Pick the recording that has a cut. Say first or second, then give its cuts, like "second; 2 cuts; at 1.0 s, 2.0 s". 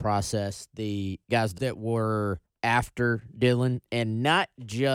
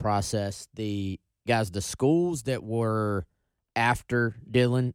first; 4 cuts; at 1.2 s, 1.6 s, 2.5 s, 3.9 s